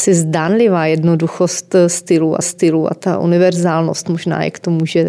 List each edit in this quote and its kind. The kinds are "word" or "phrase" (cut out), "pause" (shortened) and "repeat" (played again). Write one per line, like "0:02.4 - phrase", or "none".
0:02.4 - repeat